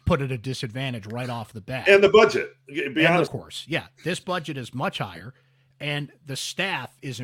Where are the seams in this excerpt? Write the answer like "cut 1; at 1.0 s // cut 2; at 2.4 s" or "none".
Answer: cut 1; at 3.3 s